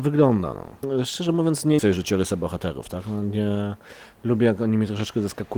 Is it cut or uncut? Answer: cut